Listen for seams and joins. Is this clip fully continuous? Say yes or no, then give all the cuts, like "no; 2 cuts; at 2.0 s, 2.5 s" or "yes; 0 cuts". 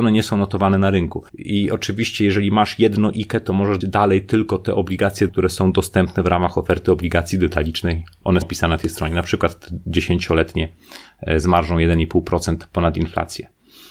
no; 4 cuts; at 1.3 s, 3.8 s, 5.3 s, 8.4 s